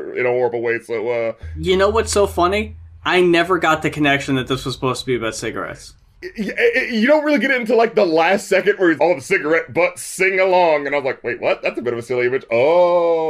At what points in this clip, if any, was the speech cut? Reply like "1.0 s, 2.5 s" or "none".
9.0 s